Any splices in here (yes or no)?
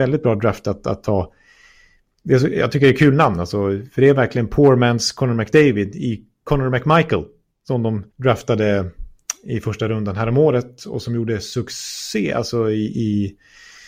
yes